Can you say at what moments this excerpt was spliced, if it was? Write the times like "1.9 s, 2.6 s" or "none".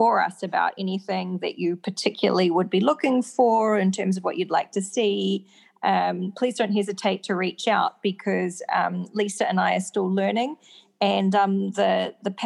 none